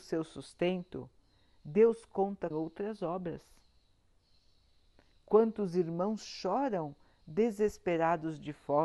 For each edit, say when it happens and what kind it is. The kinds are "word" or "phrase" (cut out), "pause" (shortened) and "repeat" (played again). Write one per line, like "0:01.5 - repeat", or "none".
0:02.5 - phrase